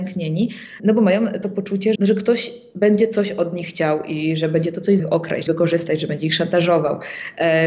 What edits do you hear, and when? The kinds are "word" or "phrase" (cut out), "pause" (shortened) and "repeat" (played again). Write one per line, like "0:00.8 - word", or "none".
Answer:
0:01.9 - word
0:05.0 - phrase
0:05.5 - phrase